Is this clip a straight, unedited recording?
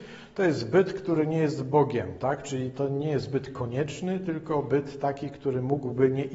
yes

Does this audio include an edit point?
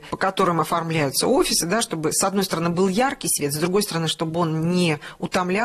no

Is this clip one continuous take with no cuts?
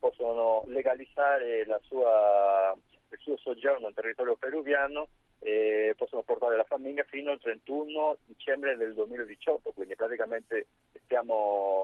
yes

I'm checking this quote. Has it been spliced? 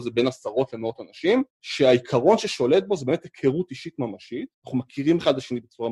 yes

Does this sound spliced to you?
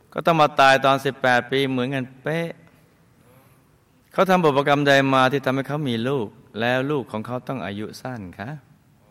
no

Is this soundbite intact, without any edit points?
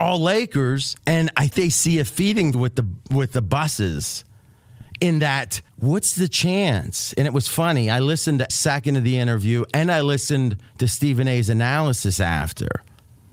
no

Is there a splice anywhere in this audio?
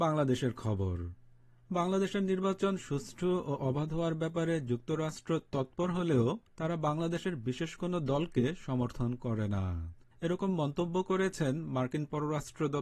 yes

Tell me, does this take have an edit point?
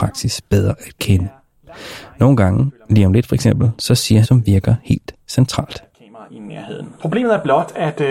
yes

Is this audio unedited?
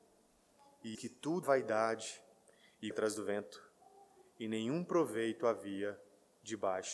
no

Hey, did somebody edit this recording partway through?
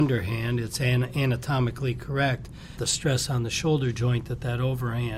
yes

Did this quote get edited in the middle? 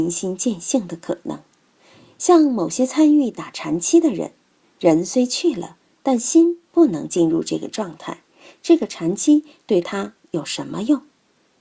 no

